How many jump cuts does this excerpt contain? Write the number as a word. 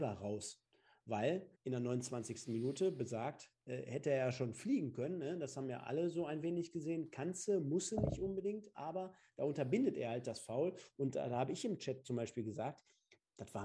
one